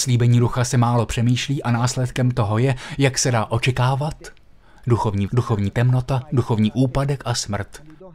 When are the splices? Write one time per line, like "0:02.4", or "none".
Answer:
0:05.3